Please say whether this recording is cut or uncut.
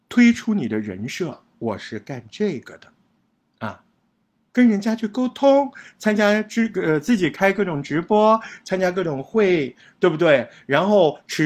uncut